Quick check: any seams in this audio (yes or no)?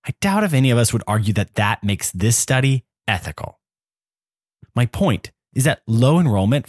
no